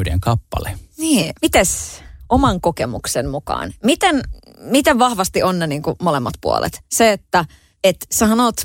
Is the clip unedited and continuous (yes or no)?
yes